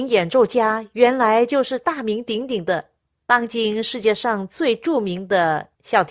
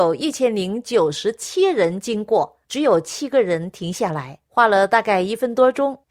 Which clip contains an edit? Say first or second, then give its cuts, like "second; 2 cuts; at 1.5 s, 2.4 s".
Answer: second; 1 cut; at 2.6 s